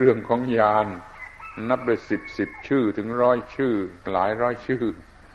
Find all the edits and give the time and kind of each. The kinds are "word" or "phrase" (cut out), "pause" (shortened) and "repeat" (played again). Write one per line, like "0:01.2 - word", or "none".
0:04.0 - pause